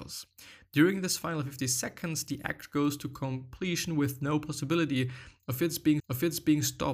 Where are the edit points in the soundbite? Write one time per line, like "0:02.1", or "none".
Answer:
0:06.0